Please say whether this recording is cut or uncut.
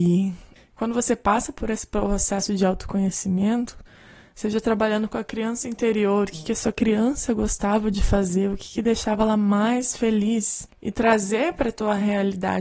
uncut